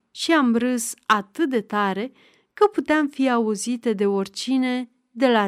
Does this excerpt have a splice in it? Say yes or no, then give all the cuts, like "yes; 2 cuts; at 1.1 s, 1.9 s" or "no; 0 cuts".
no; 0 cuts